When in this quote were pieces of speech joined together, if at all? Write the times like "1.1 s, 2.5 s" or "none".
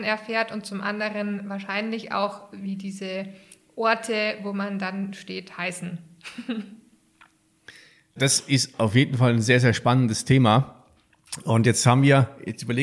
8.2 s

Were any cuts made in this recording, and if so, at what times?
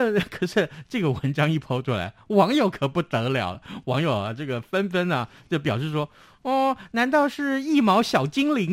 none

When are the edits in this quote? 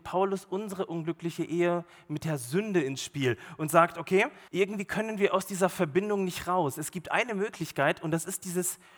4.5 s

